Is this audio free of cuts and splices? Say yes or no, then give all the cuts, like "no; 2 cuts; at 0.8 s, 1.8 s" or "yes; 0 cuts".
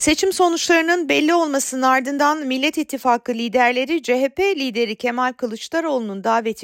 yes; 0 cuts